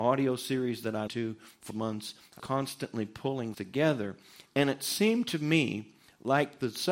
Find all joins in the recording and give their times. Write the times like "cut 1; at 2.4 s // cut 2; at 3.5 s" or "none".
cut 1; at 1.1 s // cut 2; at 1.7 s // cut 3; at 2.4 s // cut 4; at 3.5 s